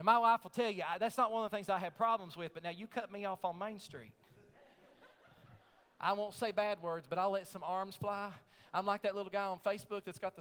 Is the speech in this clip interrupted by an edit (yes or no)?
no